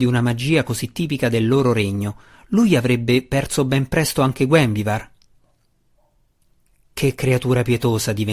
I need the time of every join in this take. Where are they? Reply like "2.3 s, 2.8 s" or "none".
none